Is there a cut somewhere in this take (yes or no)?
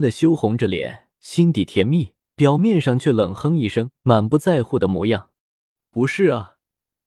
yes